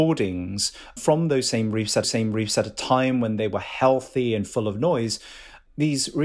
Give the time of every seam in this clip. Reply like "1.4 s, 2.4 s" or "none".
1.0 s, 2.0 s